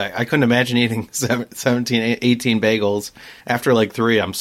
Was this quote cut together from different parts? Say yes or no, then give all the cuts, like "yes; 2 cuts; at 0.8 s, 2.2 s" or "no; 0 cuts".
yes; 1 cut; at 3.4 s